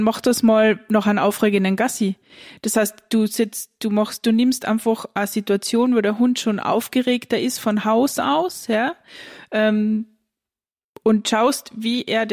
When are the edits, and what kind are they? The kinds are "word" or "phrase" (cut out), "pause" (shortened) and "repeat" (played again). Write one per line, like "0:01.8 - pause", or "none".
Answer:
none